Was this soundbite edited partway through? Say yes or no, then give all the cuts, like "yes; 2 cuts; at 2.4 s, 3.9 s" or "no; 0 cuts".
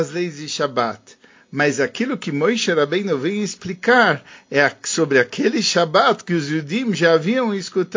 no; 0 cuts